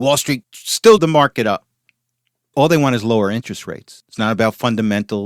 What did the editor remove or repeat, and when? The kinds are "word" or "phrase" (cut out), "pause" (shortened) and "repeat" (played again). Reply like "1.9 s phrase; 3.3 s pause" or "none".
1.0 s word; 2.5 s word